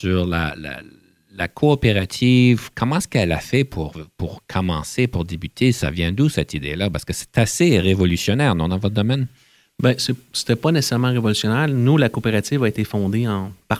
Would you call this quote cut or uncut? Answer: uncut